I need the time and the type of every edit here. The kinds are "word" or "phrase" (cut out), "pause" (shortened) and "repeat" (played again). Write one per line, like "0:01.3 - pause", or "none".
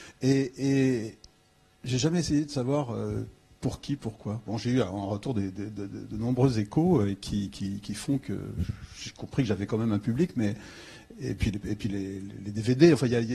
none